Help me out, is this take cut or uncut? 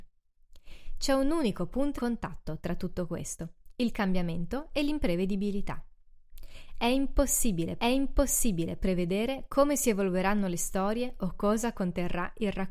cut